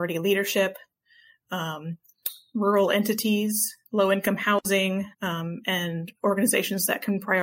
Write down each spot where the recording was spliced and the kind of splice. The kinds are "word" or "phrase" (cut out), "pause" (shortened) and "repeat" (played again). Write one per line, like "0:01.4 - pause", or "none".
0:03.9 - pause
0:05.1 - pause